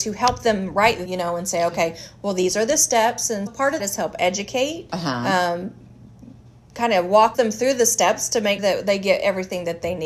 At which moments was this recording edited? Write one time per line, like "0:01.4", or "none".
0:01.1
0:03.5
0:03.8
0:07.3
0:08.6